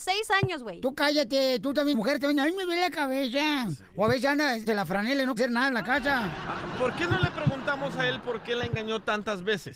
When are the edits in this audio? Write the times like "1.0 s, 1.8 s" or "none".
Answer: 1.9 s, 4.7 s, 5.4 s